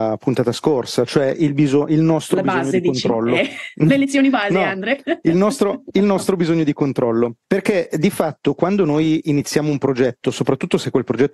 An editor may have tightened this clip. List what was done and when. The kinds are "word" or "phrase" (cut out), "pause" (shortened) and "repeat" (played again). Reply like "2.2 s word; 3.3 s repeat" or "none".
7.4 s pause

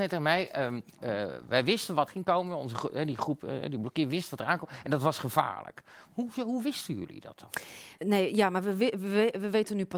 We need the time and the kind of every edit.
2.1 s word; 8.0 s pause

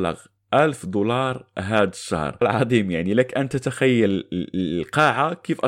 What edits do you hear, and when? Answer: 2.4 s word

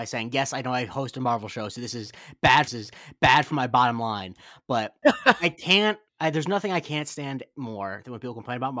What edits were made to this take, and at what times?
2.7 s repeat; 5.0 s word; 6.1 s pause

